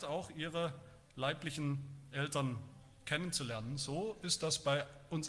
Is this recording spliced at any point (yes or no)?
no